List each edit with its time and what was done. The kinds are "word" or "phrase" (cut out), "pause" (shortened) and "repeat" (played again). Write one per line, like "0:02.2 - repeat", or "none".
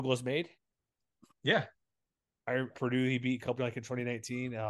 0:02.7 - phrase
0:03.6 - word